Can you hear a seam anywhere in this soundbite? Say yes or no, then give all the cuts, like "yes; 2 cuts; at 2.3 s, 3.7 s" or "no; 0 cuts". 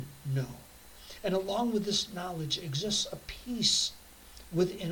no; 0 cuts